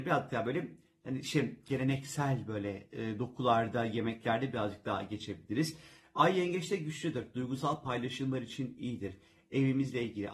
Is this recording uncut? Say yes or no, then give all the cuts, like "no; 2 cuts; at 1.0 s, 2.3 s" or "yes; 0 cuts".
no; 1 cut; at 1.7 s